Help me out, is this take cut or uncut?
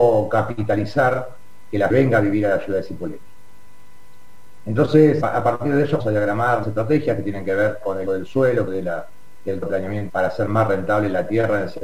cut